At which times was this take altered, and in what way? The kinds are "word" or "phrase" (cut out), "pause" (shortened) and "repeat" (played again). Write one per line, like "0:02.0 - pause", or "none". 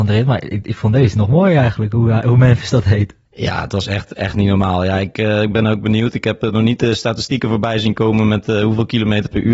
none

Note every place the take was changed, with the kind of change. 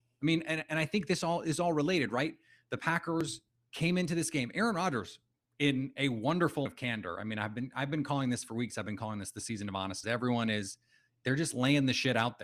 0:06.7 - word
0:10.0 - word

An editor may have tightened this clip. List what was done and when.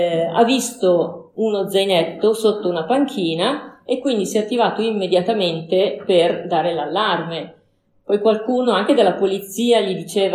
none

